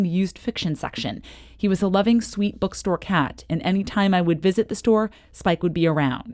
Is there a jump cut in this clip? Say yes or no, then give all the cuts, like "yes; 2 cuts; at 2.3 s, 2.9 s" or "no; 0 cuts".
no; 0 cuts